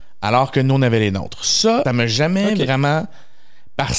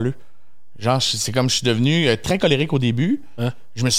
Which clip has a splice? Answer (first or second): first